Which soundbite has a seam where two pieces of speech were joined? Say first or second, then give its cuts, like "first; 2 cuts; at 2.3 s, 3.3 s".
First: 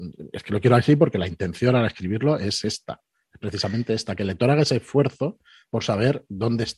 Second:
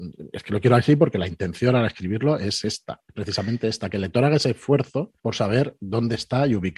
second; 2 cuts; at 3.1 s, 5.2 s